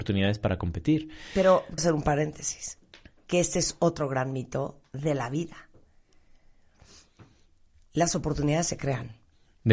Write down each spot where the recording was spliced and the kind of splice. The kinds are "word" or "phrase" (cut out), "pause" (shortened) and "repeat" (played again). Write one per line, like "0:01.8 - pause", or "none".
0:01.8 - word